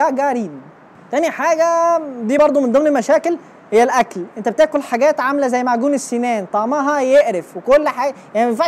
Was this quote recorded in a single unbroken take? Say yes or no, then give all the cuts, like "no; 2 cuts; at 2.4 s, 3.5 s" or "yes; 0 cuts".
yes; 0 cuts